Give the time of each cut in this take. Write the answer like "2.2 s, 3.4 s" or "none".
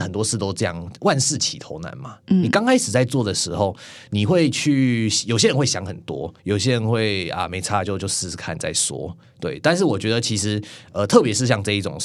6.4 s